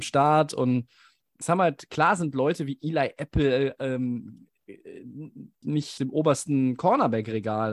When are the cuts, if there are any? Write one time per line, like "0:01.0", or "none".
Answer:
0:01.4
0:05.6
0:06.0